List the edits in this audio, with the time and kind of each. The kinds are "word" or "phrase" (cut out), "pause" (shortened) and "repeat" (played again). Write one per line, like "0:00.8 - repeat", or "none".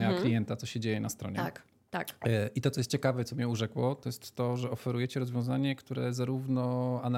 none